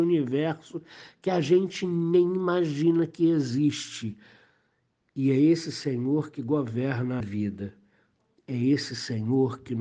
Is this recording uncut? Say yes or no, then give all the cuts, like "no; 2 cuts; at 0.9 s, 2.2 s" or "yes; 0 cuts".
no; 1 cut; at 7.2 s